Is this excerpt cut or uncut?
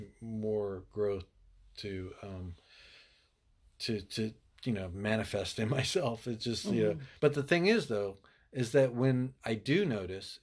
cut